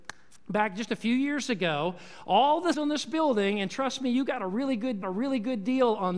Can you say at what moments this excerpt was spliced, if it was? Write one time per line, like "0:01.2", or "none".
0:02.7
0:05.0